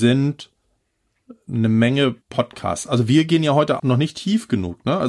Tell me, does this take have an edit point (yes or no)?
yes